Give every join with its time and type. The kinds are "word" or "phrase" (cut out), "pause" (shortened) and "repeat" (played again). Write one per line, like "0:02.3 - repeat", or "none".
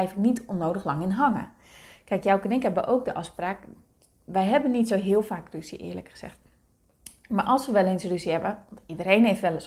none

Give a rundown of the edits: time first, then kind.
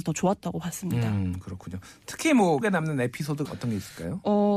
0:02.6 - word
0:03.4 - word

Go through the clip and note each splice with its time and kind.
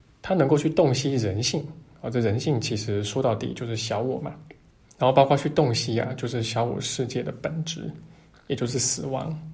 0:04.7 - pause

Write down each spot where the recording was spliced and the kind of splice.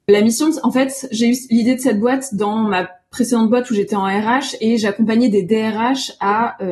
none

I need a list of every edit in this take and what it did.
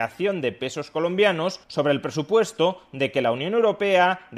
0:01.6 - pause

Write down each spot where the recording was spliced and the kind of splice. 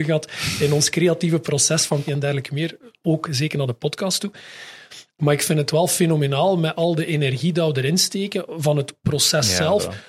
0:02.1 - word

